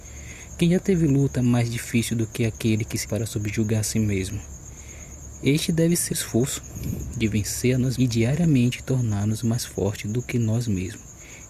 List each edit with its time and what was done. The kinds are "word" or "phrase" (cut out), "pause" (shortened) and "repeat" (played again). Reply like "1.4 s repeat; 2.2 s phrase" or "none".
3.0 s word; 6.1 s word; 8.0 s word